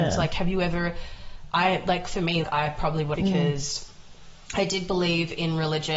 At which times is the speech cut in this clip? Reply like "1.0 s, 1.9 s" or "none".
2.4 s, 3.2 s